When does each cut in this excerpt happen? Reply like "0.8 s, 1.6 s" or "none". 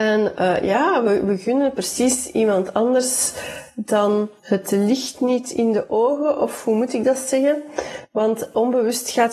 4.4 s